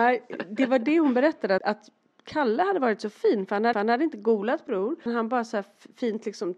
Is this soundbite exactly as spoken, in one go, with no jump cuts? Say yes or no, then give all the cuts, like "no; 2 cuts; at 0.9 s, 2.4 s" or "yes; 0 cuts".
no; 4 cuts; at 1.6 s, 3.7 s, 4.7 s, 5.1 s